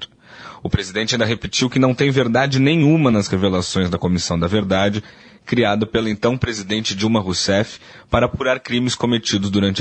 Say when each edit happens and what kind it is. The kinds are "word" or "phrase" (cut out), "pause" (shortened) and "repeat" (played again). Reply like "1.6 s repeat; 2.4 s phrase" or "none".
none